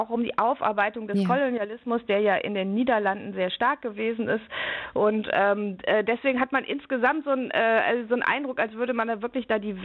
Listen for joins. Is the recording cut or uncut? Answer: uncut